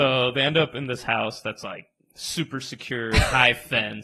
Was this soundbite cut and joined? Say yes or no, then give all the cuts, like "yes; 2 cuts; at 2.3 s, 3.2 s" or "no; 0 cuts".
no; 0 cuts